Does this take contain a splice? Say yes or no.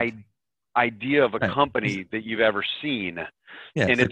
no